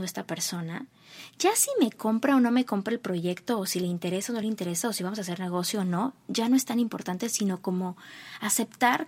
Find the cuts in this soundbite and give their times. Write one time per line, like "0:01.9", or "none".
none

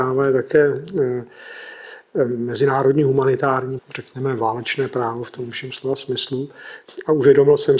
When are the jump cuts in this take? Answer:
0:03.8

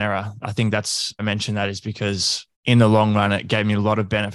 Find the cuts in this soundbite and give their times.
0:01.2
0:02.5

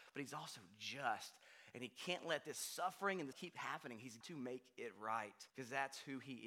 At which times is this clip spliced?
0:03.3
0:04.2
0:05.5

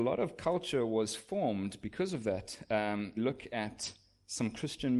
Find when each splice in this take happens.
0:03.2

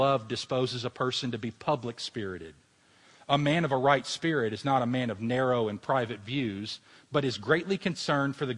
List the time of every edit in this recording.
none

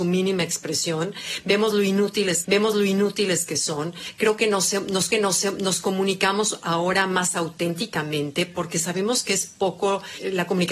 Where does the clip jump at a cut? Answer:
0:02.4
0:05.1

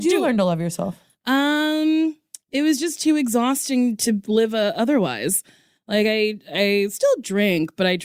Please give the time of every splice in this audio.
none

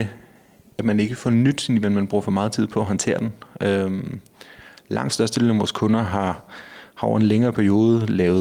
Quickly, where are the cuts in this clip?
0:01.8

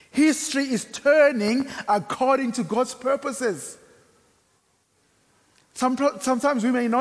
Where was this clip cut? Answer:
none

